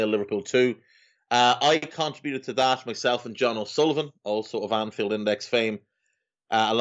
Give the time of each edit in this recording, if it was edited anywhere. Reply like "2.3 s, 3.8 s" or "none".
none